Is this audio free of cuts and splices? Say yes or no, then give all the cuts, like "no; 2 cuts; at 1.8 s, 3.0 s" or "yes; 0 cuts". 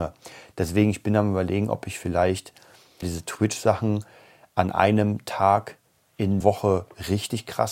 no; 2 cuts; at 3.0 s, 6.4 s